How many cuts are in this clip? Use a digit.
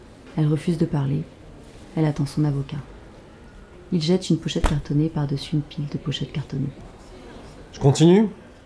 1